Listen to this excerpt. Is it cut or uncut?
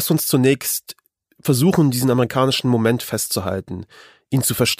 uncut